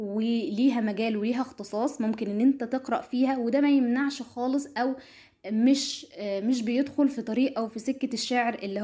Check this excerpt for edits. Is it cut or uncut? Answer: uncut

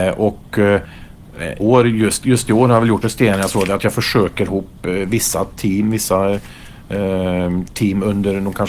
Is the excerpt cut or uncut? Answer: cut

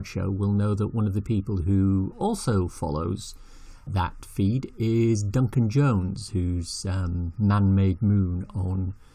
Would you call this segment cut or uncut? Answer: cut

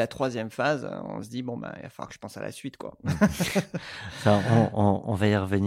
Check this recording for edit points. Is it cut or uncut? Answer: uncut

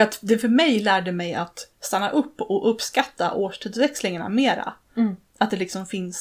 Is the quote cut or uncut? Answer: cut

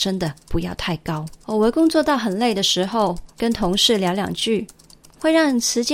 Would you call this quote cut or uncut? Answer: cut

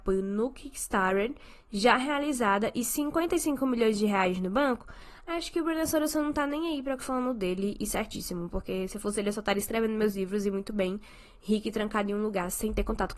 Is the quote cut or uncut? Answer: cut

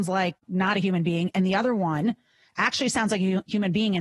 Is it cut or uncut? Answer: uncut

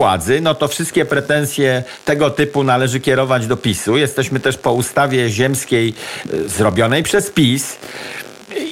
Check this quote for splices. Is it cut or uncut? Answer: uncut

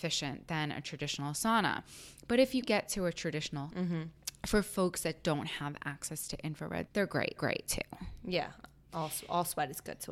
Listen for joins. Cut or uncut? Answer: cut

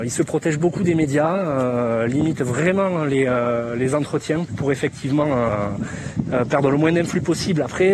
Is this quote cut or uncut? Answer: uncut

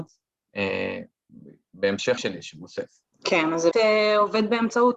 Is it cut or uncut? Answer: cut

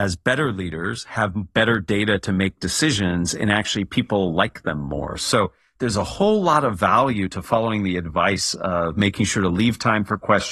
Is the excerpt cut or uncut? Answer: uncut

